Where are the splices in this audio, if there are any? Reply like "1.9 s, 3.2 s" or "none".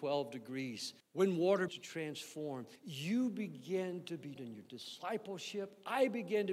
1.0 s, 1.7 s, 2.8 s, 4.4 s